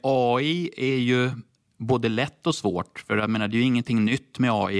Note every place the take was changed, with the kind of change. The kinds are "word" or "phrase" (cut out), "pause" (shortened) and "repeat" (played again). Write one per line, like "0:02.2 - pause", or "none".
none